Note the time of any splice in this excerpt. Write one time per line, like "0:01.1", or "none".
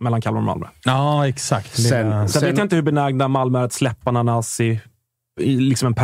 none